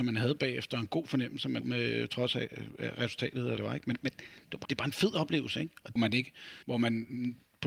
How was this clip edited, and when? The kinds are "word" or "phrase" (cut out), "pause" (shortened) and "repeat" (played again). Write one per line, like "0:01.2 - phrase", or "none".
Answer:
0:01.6 - word
0:03.6 - phrase
0:04.6 - word
0:06.0 - phrase
0:06.6 - pause